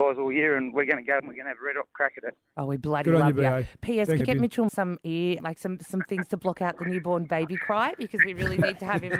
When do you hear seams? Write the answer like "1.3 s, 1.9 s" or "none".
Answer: 1.2 s, 4.2 s, 4.7 s, 5.4 s

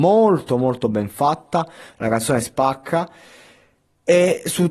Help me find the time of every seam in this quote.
none

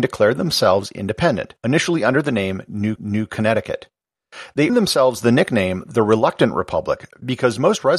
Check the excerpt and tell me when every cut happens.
1.6 s, 3.0 s, 4.7 s

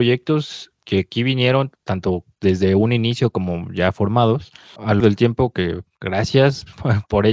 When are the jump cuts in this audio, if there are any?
5.0 s

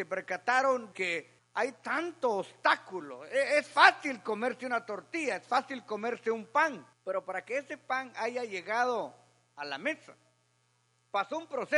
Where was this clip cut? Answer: 0.9 s, 1.4 s, 6.9 s

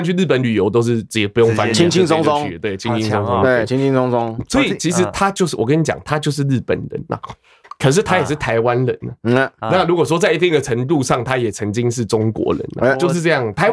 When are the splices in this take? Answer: none

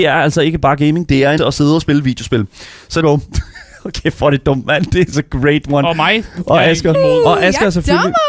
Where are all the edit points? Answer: 1.4 s, 3.0 s, 5.1 s, 6.9 s

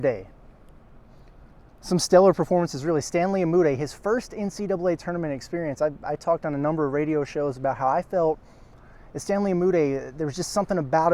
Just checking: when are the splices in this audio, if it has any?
none

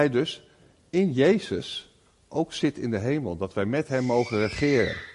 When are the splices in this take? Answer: none

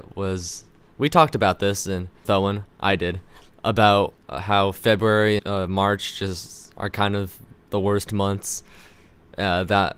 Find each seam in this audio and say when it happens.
2.2 s, 2.7 s, 4.2 s, 5.4 s

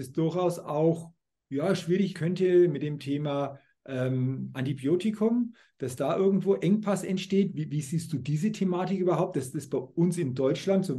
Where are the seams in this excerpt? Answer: 2.1 s

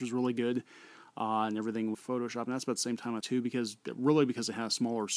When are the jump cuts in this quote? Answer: 1.9 s, 3.2 s

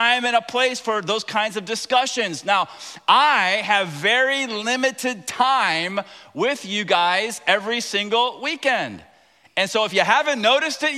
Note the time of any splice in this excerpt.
none

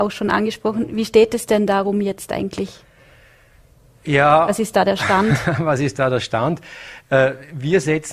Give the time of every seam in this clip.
none

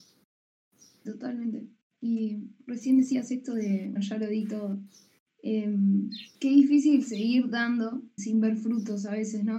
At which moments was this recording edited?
4.0 s, 6.3 s, 8.2 s

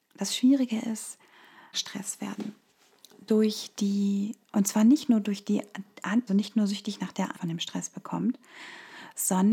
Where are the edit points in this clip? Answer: 1.7 s, 4.4 s, 6.3 s, 7.3 s

